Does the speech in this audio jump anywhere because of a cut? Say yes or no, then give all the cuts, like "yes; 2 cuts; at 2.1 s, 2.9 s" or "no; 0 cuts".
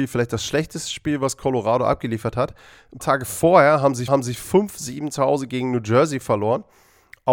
yes; 2 cuts; at 3.0 s, 4.1 s